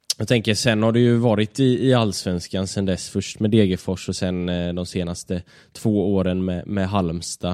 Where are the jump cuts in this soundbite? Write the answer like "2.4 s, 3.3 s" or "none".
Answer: none